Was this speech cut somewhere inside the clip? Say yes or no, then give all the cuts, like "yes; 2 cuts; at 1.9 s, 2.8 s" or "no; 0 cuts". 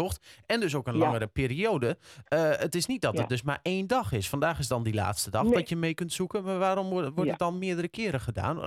no; 0 cuts